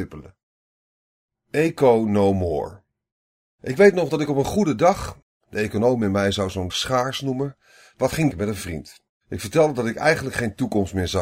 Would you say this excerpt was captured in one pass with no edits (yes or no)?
no